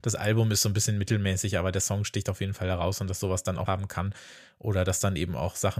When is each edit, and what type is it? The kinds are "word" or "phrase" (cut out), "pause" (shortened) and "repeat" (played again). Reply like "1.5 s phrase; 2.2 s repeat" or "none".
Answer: 3.7 s phrase